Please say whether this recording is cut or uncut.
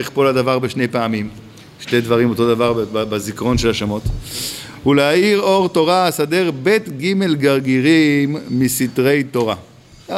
uncut